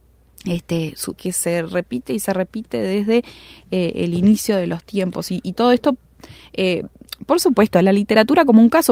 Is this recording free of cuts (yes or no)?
no